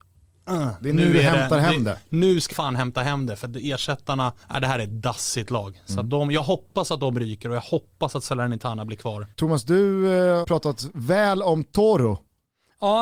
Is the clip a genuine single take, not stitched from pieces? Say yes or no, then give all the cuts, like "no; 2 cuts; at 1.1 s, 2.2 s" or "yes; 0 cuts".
no; 4 cuts; at 2.5 s, 4.4 s, 9.3 s, 10.4 s